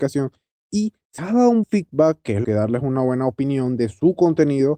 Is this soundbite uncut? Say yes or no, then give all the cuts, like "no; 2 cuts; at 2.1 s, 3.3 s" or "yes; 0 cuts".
no; 3 cuts; at 1.2 s, 1.6 s, 2.4 s